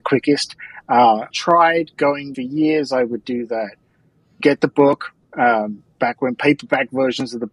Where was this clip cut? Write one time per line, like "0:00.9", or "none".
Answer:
0:01.3
0:02.3
0:04.4